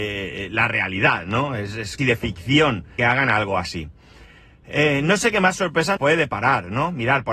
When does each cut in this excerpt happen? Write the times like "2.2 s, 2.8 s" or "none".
2.0 s, 3.0 s, 6.0 s